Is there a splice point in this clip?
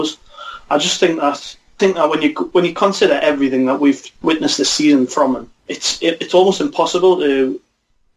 yes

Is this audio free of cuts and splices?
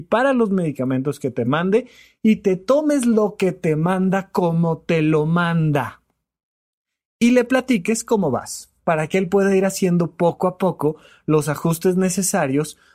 yes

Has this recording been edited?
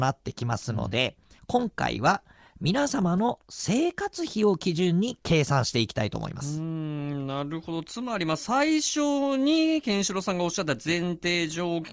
yes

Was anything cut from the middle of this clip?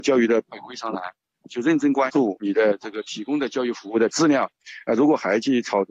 no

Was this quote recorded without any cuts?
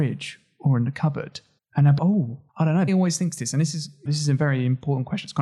no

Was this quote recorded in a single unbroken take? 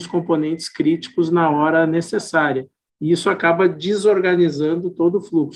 yes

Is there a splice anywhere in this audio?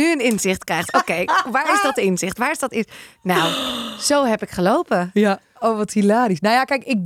no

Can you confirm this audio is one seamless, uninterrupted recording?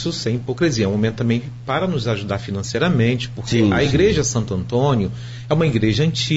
yes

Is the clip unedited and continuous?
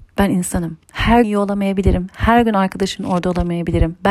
no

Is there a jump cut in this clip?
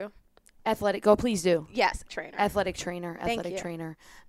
yes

